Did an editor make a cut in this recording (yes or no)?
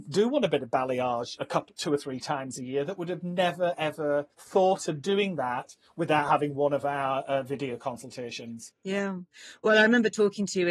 yes